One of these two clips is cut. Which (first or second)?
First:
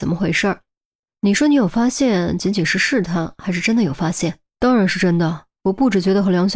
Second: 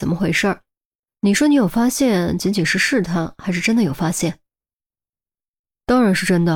first